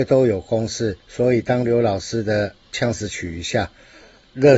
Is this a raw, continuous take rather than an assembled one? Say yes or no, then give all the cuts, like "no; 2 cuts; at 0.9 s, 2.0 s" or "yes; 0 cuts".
no; 1 cut; at 1.0 s